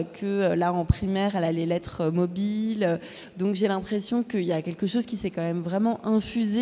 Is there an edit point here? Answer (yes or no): no